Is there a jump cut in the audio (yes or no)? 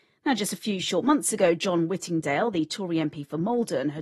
no